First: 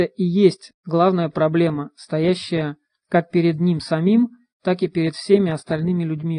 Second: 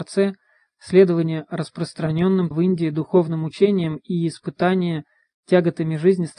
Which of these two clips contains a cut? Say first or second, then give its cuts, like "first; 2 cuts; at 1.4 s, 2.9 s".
second; 1 cut; at 2.5 s